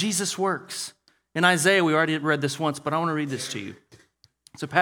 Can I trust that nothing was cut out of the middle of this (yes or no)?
yes